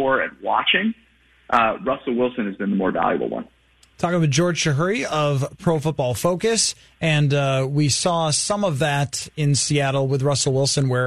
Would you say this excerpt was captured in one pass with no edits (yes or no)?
yes